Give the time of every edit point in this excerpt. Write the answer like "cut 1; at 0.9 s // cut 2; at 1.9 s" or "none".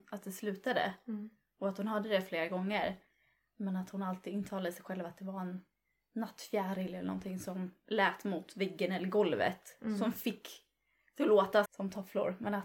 cut 1; at 11.7 s

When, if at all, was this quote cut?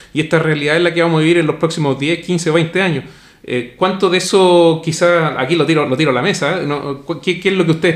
none

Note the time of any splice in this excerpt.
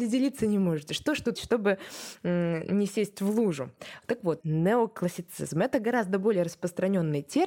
cut 1; at 1.4 s // cut 2; at 4.4 s

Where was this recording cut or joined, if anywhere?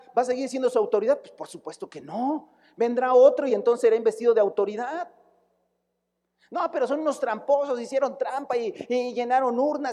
none

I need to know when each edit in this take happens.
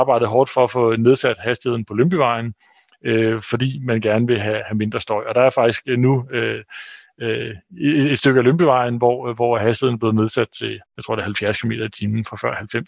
cut 1; at 10.9 s

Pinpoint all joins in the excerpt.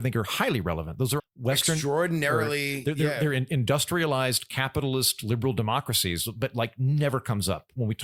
cut 1; at 1.2 s

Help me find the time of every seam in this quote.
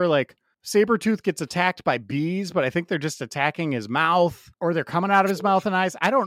cut 1; at 4.5 s

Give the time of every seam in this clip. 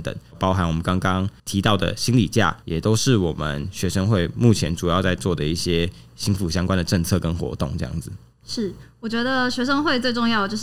cut 1; at 2.6 s // cut 2; at 8.3 s

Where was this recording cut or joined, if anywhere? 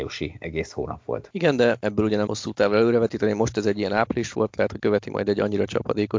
cut 1; at 2.3 s // cut 2; at 4.8 s

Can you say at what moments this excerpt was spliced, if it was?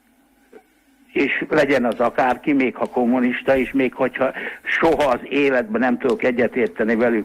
none

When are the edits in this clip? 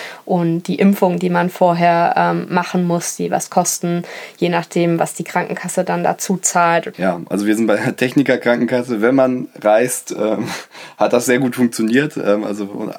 none

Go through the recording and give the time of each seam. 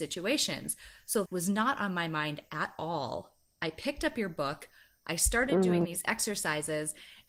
cut 1; at 1.3 s

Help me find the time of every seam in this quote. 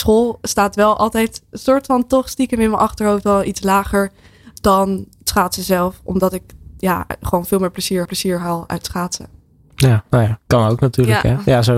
cut 1; at 8.1 s

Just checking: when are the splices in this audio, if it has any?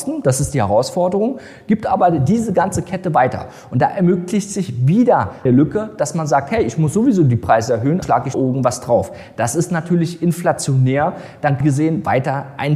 cut 1; at 5.5 s // cut 2; at 8.0 s // cut 3; at 8.3 s // cut 4; at 11.6 s

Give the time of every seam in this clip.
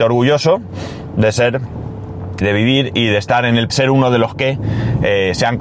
cut 1; at 2.4 s // cut 2; at 3.7 s

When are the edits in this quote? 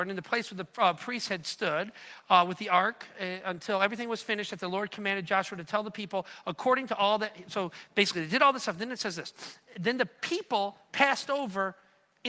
none

